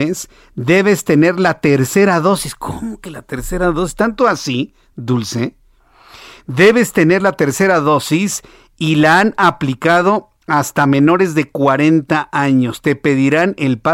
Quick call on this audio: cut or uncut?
uncut